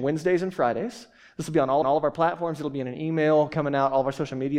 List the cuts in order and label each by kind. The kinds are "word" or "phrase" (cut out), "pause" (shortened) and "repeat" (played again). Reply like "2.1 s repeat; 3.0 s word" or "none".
1.8 s repeat